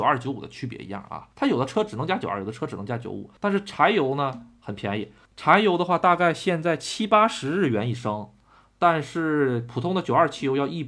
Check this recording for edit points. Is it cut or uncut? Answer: cut